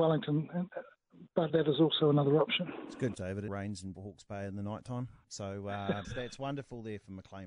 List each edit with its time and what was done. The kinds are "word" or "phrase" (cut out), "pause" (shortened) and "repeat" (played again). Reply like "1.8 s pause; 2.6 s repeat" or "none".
1.5 s word; 3.1 s word; 3.5 s word; 3.9 s word; 6.0 s word